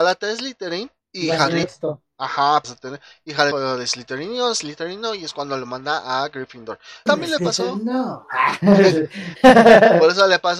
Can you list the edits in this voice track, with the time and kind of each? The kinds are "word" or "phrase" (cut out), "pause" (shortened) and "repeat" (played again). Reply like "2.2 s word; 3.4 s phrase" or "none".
1.0 s pause; 1.6 s word; 2.6 s word; 3.5 s word; 7.1 s word